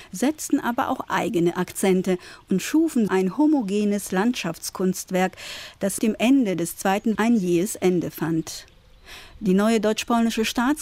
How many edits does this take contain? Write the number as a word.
three